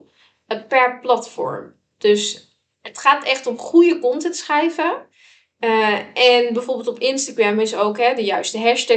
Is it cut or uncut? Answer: uncut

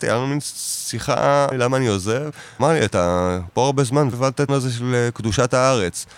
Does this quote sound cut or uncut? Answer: cut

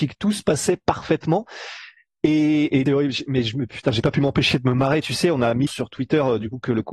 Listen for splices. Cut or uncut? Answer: cut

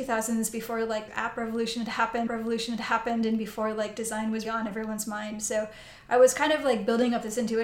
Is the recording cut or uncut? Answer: cut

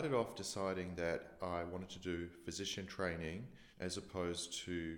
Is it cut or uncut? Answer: cut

